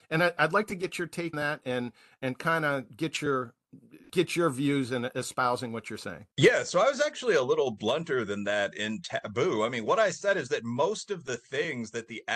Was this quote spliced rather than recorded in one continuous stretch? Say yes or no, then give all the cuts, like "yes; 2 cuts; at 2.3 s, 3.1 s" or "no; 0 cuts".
yes; 2 cuts; at 1.3 s, 6.3 s